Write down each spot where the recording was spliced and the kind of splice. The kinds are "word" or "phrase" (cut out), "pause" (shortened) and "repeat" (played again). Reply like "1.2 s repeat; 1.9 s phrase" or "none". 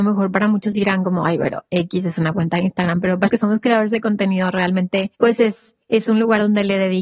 3.3 s word; 5.1 s pause; 5.8 s pause